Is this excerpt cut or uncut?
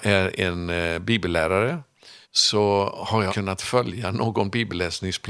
cut